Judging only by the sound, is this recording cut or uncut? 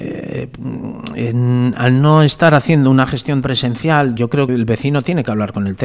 cut